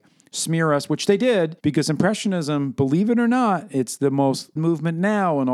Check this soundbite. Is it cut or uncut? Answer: cut